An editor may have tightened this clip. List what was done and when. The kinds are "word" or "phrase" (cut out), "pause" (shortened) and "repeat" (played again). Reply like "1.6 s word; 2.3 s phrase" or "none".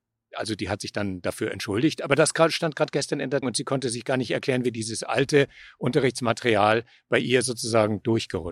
3.4 s word